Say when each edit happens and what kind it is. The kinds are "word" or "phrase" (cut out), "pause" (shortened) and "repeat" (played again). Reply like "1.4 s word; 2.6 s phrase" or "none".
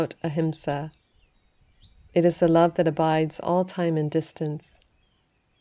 none